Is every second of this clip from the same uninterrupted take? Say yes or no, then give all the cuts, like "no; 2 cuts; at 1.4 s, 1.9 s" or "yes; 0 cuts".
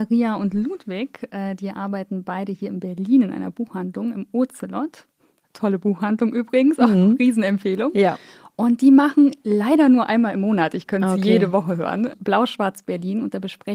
no; 1 cut; at 12.1 s